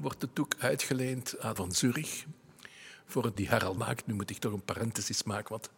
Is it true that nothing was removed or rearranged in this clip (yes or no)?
no